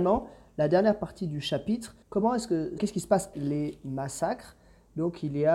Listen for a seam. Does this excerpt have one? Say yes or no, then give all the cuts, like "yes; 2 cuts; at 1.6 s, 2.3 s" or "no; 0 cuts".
yes; 3 cuts; at 2.0 s, 2.8 s, 3.3 s